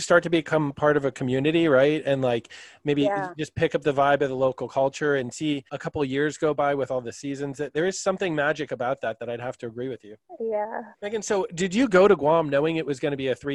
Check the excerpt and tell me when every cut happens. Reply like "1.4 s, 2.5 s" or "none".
5.7 s, 10.9 s